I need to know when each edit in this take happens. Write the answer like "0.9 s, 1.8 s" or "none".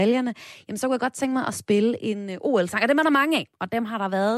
none